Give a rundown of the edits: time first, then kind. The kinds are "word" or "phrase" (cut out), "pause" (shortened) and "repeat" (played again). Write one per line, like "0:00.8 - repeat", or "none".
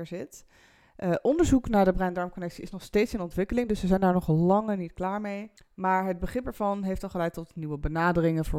0:05.6 - pause